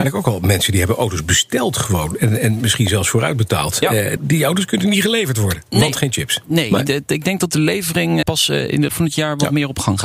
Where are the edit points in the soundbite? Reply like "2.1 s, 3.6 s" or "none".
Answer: 4.2 s, 8.2 s, 8.9 s